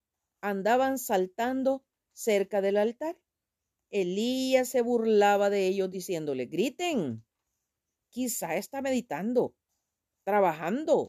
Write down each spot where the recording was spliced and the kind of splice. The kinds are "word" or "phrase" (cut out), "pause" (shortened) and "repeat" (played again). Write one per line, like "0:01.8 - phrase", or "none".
none